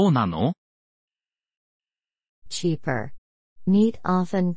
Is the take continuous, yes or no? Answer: no